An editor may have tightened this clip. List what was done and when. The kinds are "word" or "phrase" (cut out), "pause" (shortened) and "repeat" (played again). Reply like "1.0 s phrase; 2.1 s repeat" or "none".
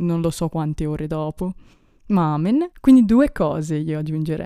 1.7 s pause; 2.7 s pause